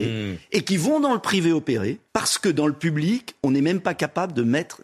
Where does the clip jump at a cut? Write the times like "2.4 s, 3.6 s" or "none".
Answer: 2.1 s